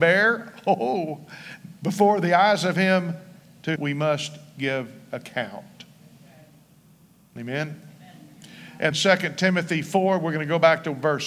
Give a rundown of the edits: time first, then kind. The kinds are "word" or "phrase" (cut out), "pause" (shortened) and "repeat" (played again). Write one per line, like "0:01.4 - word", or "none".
0:03.8 - word
0:08.9 - word